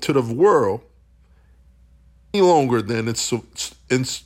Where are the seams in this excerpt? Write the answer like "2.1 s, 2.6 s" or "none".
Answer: 2.3 s